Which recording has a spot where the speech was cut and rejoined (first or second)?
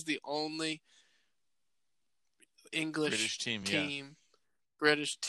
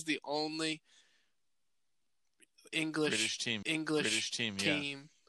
second